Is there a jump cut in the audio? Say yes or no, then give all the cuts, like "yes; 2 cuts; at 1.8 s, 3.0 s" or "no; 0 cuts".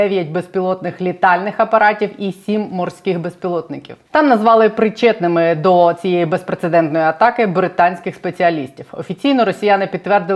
no; 0 cuts